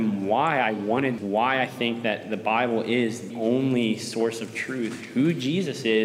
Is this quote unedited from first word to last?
no; 2 cuts; at 1.2 s, 3.3 s

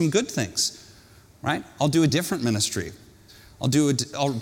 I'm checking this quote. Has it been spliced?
no; 0 cuts

